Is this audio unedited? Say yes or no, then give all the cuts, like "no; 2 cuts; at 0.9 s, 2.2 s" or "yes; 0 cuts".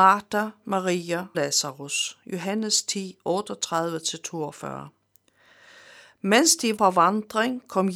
no; 2 cuts; at 1.3 s, 6.8 s